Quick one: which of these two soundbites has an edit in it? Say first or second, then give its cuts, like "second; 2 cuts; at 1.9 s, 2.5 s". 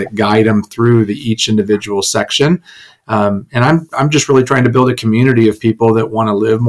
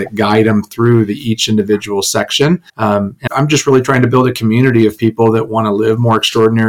second; 2 cuts; at 2.7 s, 3.3 s